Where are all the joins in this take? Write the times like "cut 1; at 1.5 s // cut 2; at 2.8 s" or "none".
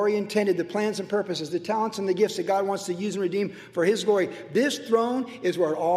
none